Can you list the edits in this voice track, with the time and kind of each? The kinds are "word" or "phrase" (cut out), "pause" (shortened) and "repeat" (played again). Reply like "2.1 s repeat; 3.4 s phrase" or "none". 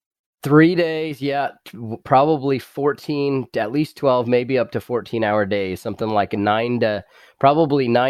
none